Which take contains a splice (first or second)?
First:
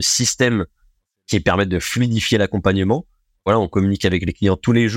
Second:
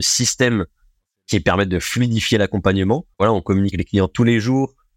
second